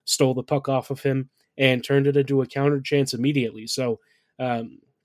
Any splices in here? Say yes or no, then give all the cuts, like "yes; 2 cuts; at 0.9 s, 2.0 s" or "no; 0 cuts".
no; 0 cuts